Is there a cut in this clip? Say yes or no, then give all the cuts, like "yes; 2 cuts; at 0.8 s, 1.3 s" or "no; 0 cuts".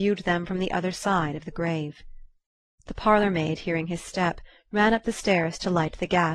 no; 0 cuts